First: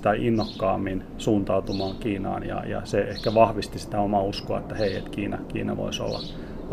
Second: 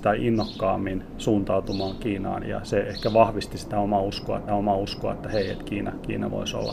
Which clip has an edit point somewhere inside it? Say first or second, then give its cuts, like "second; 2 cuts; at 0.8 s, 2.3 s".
second; 2 cuts; at 2.4 s, 4.5 s